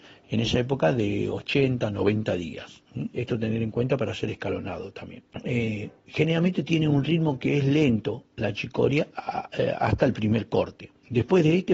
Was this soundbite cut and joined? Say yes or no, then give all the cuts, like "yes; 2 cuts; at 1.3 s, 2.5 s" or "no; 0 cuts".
yes; 1 cut; at 5.3 s